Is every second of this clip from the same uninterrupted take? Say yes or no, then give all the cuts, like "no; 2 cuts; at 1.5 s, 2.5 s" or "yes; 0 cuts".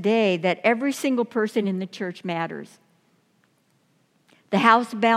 yes; 0 cuts